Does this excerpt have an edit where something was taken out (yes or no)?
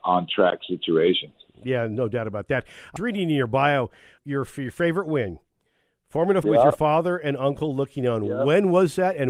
yes